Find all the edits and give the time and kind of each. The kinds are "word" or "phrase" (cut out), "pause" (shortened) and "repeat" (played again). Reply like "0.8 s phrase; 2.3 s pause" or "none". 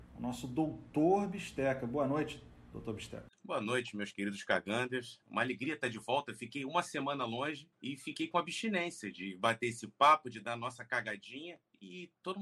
3.3 s pause; 5.2 s pause